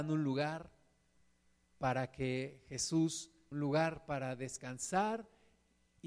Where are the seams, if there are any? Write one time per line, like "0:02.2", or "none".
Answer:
0:03.5